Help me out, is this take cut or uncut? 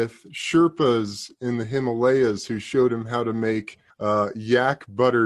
cut